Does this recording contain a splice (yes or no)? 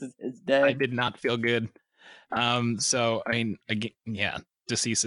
no